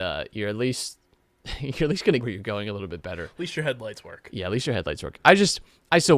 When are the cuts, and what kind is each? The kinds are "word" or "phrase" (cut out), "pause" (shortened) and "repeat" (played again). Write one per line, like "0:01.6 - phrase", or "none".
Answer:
0:02.2 - word